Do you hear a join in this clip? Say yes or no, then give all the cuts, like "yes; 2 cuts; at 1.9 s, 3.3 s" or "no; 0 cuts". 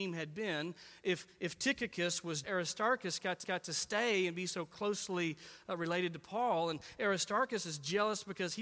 yes; 2 cuts; at 2.4 s, 3.4 s